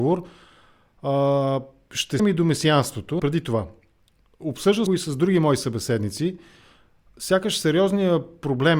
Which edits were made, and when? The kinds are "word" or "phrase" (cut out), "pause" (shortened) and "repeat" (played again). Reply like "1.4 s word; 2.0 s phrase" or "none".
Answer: 2.2 s word; 3.2 s word; 4.9 s word